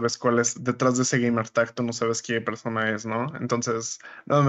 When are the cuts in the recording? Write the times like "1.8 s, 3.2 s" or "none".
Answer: none